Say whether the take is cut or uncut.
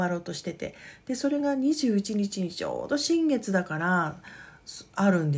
uncut